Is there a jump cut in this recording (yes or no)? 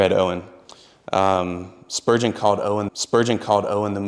yes